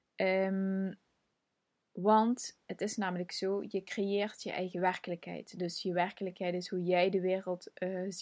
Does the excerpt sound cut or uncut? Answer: uncut